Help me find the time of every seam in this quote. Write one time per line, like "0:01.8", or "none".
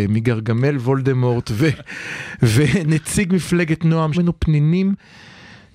0:04.1